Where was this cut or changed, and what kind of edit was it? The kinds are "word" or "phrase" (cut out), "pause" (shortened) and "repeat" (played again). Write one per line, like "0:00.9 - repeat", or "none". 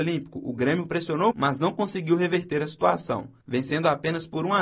0:01.3 - word